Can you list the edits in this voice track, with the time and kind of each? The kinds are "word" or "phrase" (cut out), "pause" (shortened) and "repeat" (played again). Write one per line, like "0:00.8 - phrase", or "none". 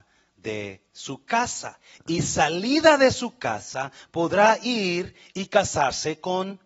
none